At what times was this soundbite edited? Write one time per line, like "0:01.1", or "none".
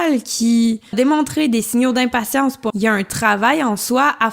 0:00.9
0:02.7